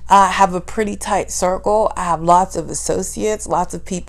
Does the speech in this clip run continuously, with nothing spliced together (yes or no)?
yes